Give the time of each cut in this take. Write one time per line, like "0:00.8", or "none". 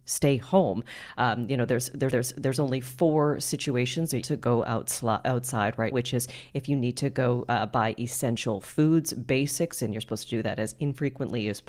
0:02.1
0:04.2
0:05.9